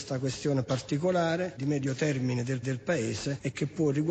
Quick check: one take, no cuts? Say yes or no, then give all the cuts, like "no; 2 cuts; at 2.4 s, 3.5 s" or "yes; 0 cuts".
no; 2 cuts; at 1.6 s, 2.6 s